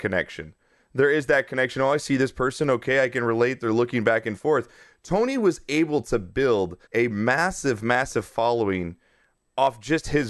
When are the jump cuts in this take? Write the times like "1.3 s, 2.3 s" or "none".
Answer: 6.8 s